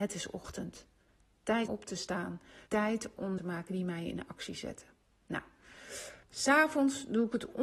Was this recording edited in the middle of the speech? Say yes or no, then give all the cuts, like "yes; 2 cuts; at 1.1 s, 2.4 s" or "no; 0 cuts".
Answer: yes; 4 cuts; at 1.7 s, 2.7 s, 3.4 s, 6.2 s